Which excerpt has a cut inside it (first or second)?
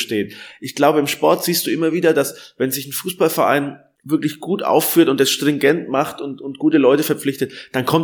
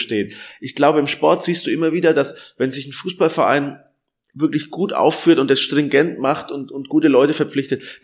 first